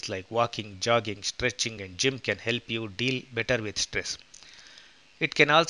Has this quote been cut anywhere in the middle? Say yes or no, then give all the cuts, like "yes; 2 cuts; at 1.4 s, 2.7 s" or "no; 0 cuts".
no; 0 cuts